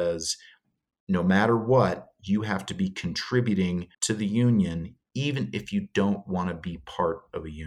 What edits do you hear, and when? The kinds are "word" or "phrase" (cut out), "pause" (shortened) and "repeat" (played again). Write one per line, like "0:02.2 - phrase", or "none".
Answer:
0:03.9 - pause